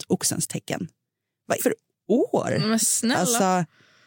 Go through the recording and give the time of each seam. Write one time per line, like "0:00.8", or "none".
0:01.6